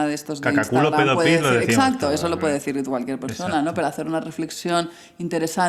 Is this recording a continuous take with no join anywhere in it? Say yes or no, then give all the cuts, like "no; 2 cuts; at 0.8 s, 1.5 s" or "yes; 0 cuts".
yes; 0 cuts